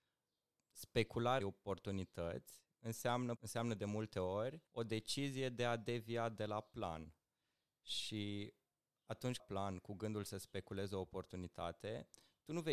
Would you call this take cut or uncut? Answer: cut